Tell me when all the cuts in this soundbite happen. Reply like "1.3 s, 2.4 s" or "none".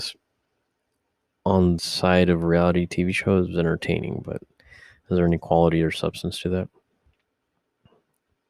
1.8 s